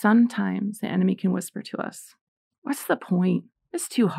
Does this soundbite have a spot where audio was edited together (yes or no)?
yes